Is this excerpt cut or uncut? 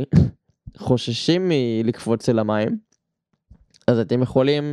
uncut